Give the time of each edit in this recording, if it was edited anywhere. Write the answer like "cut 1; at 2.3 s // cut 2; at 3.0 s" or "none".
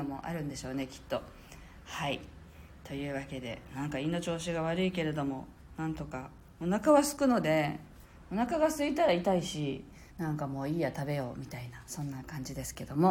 cut 1; at 10.1 s